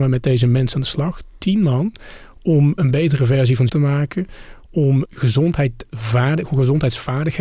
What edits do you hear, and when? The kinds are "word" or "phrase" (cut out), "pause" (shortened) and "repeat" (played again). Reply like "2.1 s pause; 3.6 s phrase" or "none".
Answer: 2.8 s word; 3.7 s word; 5.0 s word